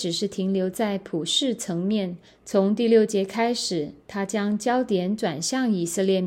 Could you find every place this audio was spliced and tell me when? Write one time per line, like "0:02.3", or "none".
0:02.3